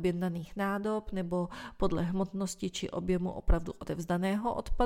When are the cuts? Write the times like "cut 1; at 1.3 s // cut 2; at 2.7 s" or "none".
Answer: none